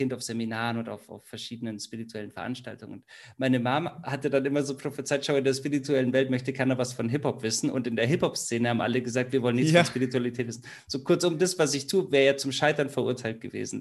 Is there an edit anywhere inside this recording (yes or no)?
no